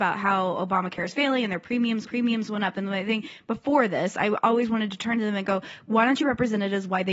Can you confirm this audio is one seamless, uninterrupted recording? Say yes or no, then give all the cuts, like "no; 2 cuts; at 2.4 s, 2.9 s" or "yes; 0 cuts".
no; 2 cuts; at 2.0 s, 6.2 s